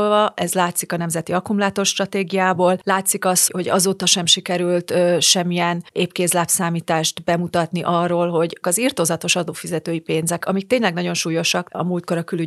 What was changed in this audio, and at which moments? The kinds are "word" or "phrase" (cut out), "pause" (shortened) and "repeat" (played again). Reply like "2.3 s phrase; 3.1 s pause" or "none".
3.5 s word; 8.6 s word; 10.4 s word